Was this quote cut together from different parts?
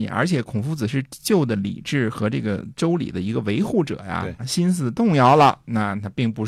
yes; 1 cut; at 4.4 s

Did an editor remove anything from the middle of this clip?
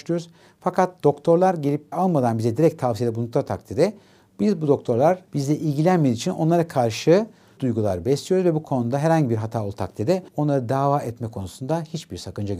yes; 4 cuts; at 1.9 s, 5.3 s, 7.6 s, 10.3 s

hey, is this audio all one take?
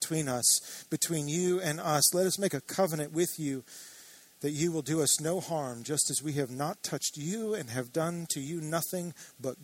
yes; 0 cuts

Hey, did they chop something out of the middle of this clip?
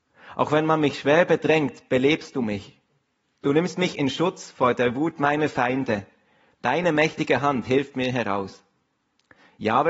no; 0 cuts

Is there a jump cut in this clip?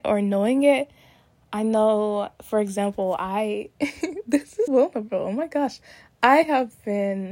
yes; 1 cut; at 4.7 s

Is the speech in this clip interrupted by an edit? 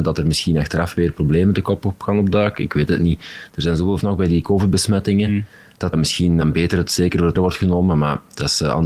yes; 4 cuts; at 4.0 s, 5.9 s, 6.4 s, 7.3 s

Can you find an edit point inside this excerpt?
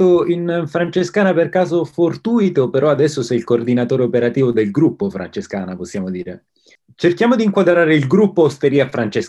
no; 0 cuts

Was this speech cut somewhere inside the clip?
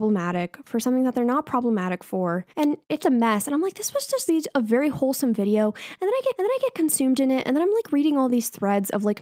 yes; 4 cuts; at 2.5 s, 3.0 s, 4.3 s, 6.3 s

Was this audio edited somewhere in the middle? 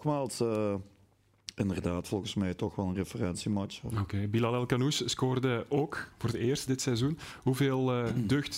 yes; 1 cut; at 6.7 s

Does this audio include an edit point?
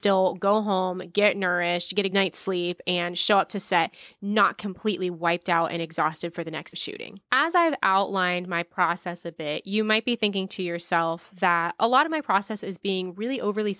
yes; 3 cuts; at 2.1 s, 6.7 s, 7.2 s

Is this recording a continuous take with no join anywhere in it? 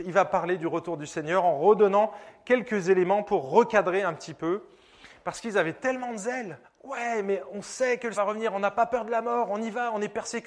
no; 2 cuts; at 6.6 s, 8.1 s

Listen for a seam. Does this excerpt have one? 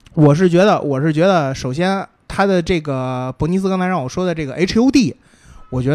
no; 0 cuts

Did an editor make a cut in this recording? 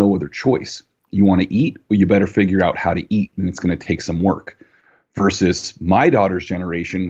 no; 0 cuts

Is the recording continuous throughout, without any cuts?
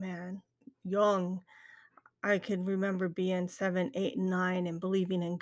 yes; 0 cuts

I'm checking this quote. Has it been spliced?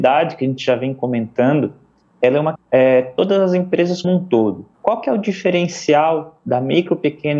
yes; 3 cuts; at 2.5 s, 4.0 s, 4.7 s

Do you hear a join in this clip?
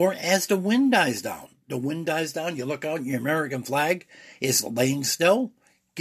no; 0 cuts

